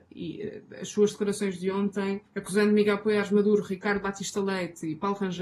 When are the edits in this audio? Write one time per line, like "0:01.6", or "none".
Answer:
0:02.3

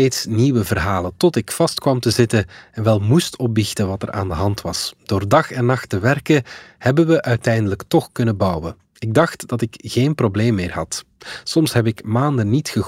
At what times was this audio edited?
none

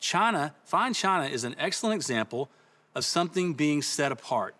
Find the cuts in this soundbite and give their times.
none

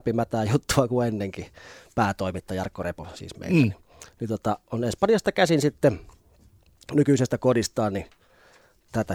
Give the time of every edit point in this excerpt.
none

